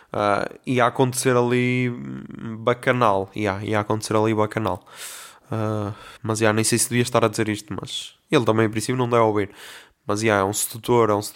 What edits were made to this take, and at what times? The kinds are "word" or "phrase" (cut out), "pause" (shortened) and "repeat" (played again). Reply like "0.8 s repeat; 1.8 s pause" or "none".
6.2 s pause